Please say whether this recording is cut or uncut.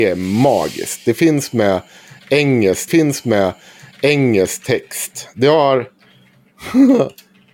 cut